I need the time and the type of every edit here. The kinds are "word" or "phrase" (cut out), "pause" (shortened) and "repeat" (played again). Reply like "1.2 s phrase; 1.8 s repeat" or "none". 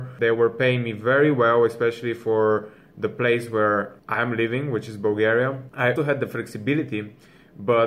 6.0 s word